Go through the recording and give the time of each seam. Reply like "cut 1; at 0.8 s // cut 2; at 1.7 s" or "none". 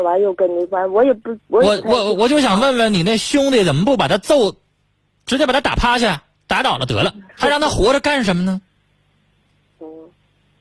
cut 1; at 7.3 s